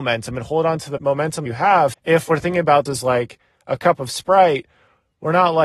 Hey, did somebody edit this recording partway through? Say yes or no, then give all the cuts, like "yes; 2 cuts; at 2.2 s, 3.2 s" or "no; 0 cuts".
yes; 4 cuts; at 1.0 s, 1.5 s, 1.9 s, 2.9 s